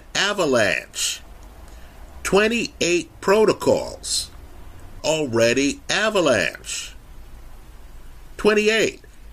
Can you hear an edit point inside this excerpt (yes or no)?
yes